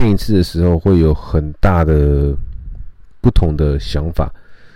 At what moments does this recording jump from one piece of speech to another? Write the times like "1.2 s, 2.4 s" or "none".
none